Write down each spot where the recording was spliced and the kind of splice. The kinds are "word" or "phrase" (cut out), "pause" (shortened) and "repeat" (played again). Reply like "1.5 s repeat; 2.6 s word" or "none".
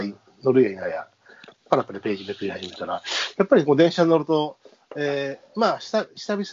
none